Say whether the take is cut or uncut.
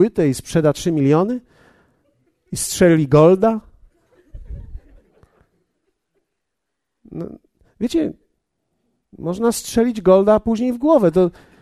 uncut